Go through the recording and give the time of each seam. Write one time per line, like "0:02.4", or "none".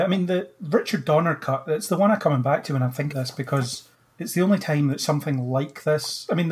0:02.2
0:03.1
0:03.9